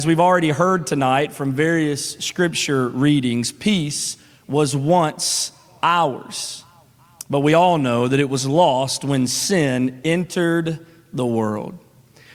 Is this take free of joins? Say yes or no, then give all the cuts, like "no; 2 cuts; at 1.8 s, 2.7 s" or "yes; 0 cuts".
yes; 0 cuts